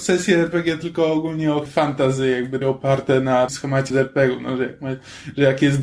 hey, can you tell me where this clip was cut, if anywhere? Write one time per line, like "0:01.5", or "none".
0:01.7
0:02.6
0:03.5
0:03.9